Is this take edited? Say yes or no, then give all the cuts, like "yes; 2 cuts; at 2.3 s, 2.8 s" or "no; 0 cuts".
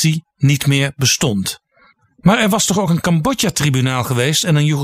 no; 0 cuts